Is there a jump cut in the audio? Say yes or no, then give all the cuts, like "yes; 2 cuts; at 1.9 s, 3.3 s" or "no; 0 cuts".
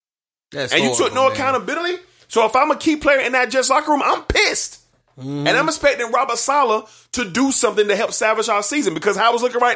no; 0 cuts